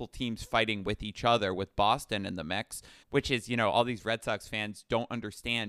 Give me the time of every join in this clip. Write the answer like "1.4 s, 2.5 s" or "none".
3.0 s